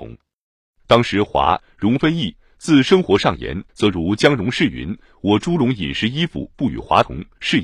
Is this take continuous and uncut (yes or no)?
no